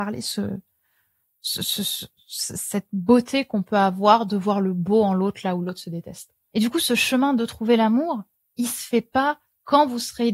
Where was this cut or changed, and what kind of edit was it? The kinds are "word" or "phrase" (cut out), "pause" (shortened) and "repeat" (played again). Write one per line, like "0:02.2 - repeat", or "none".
none